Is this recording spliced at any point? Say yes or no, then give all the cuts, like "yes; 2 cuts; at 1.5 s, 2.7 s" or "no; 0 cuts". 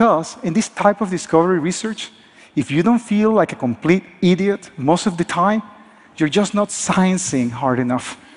no; 0 cuts